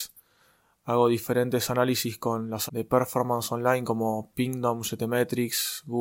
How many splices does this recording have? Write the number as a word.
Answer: one